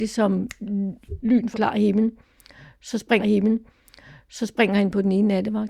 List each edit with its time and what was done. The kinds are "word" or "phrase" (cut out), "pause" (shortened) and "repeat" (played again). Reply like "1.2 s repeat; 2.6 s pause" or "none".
1.5 s word; 3.2 s repeat